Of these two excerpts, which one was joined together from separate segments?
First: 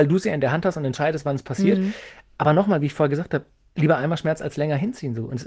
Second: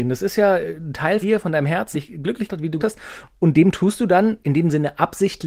second; 5 cuts; at 1.2 s, 1.9 s, 2.5 s, 2.8 s, 4.4 s

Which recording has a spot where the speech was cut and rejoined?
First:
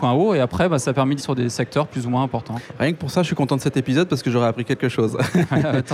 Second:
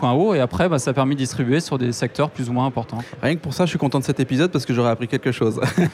first; 1 cut; at 1.2 s

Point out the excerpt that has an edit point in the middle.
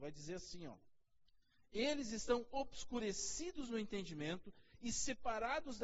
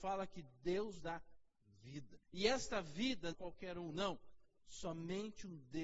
second; 3 cuts; at 1.0 s, 2.2 s, 3.3 s

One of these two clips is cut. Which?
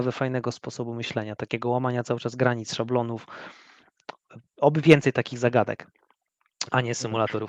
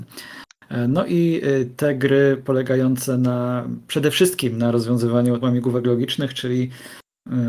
second; 1 cut; at 5.4 s

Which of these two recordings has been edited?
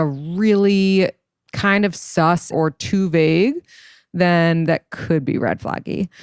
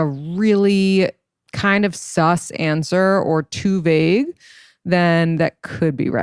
first; 1 cut; at 2.5 s

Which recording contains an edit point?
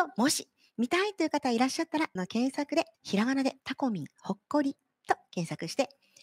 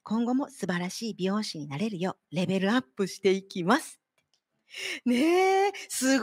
first; 3 cuts; at 2.2 s, 2.9 s, 3.6 s

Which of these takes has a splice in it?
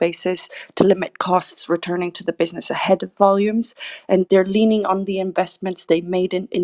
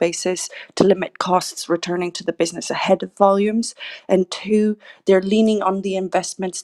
first; 1 cut; at 4.3 s

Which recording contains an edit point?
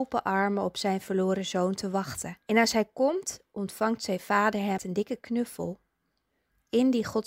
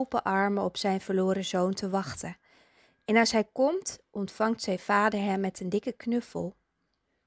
first; 2 cuts; at 2.4 s, 4.8 s

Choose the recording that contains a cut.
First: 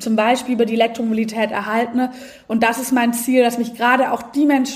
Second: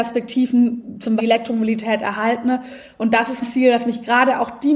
second; 2 cuts; at 1.2 s, 3.4 s

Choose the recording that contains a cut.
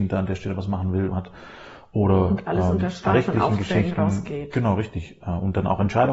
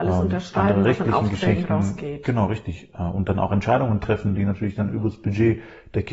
first; 2 cuts; at 1.1 s, 3.1 s

